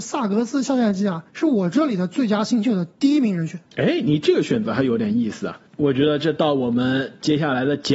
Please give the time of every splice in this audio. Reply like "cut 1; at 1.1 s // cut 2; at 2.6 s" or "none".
cut 1; at 1.3 s // cut 2; at 2.9 s // cut 3; at 3.7 s // cut 4; at 5.7 s